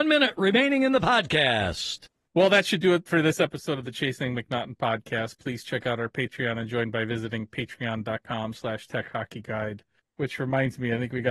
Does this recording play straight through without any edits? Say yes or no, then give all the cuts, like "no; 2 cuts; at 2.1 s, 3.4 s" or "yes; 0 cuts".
no; 1 cut; at 2.2 s